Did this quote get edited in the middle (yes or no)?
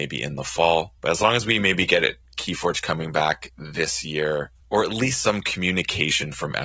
yes